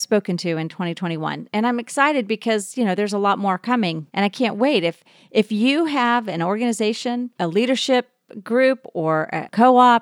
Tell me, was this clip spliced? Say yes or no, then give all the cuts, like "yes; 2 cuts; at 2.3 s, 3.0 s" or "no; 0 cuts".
yes; 2 cuts; at 4.1 s, 7.4 s